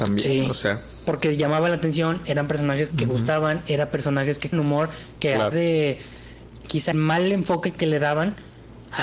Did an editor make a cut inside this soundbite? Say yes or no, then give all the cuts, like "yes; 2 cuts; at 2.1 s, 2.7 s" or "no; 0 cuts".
yes; 4 cuts; at 2.9 s, 4.5 s, 5.5 s, 6.9 s